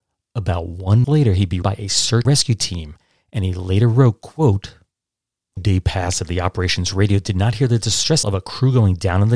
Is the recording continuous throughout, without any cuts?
no; 5 cuts; at 1.0 s, 1.6 s, 2.2 s, 5.6 s, 8.2 s

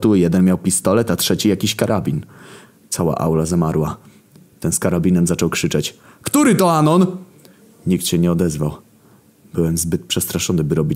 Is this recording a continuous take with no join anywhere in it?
yes; 0 cuts

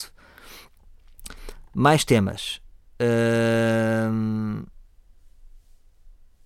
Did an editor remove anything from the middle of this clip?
no; 0 cuts

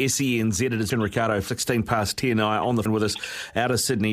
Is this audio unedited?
no; 3 cuts; at 0.9 s, 1.5 s, 2.9 s

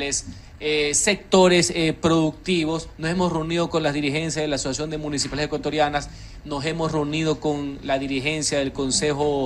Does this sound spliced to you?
no; 0 cuts

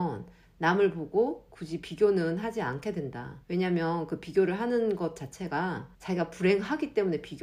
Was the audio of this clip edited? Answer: yes; 2 cuts; at 3.4 s, 5.9 s

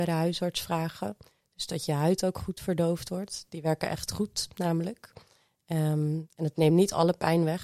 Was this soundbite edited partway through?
no; 0 cuts

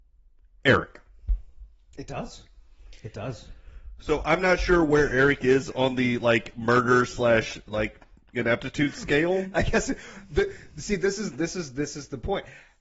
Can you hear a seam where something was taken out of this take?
no; 0 cuts

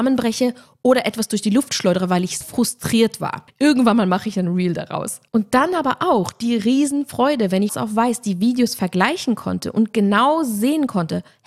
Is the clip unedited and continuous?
no; 3 cuts; at 2.4 s, 5.3 s, 7.7 s

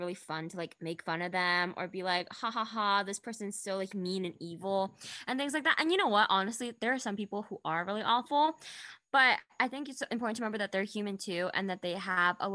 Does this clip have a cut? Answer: no; 0 cuts

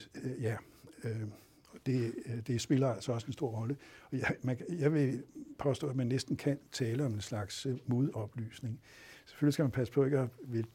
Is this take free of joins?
yes; 0 cuts

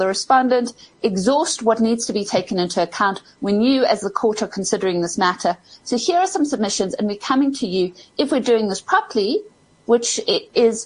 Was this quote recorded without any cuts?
yes; 0 cuts

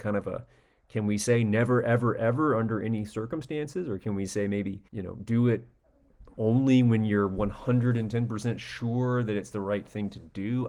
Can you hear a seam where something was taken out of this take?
yes; 1 cut; at 4.9 s

